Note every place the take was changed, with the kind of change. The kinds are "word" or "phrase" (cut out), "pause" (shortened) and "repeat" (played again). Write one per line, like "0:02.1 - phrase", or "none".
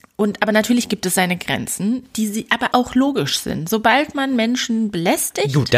0:02.7 - word